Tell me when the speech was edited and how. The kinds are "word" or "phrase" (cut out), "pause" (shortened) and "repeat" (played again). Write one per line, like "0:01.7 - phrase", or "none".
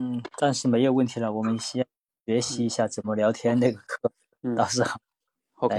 none